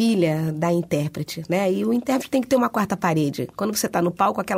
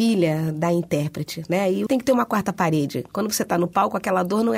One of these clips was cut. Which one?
second; 1 cut; at 1.9 s

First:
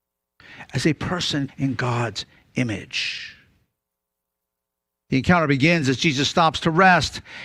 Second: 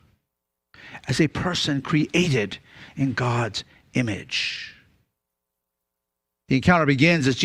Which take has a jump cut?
first; 1 cut; at 1.5 s

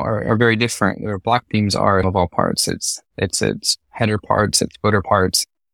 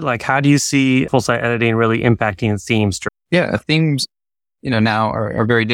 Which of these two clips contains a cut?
first; 1 cut; at 2.0 s

